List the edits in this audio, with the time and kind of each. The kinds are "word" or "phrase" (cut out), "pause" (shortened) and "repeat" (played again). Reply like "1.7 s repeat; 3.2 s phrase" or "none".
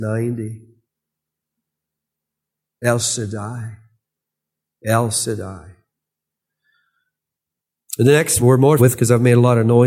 8.4 s word; 8.8 s word

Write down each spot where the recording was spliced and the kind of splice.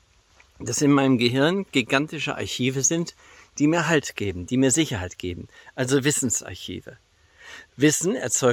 none

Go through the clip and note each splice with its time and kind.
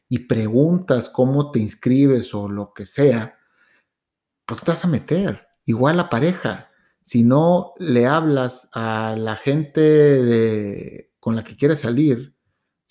none

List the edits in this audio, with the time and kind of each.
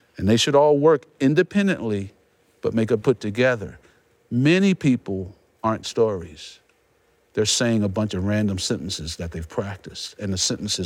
3.0 s phrase; 5.8 s word

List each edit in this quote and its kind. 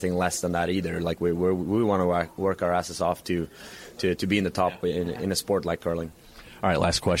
none

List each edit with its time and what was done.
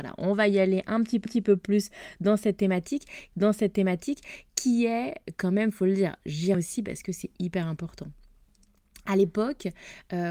1.3 s repeat; 3.3 s repeat; 6.5 s word

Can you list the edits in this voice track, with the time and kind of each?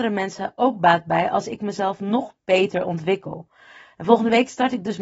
none

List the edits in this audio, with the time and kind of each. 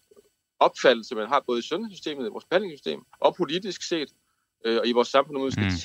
3.1 s pause

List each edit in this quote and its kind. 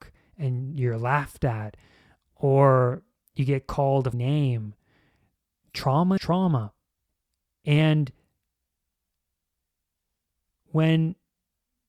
4.1 s word; 6.2 s word; 7.1 s pause

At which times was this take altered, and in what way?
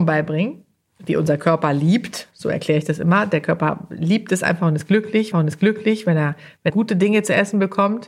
5.3 s repeat; 6.7 s word

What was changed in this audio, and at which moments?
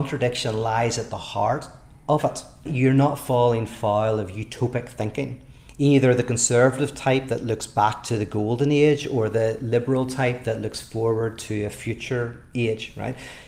2.7 s word

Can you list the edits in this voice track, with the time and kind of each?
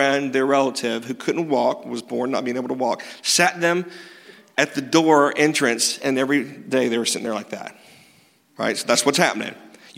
none

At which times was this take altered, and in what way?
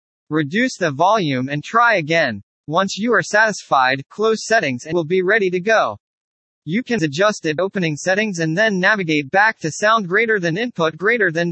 4.9 s word; 7.0 s word; 7.6 s word

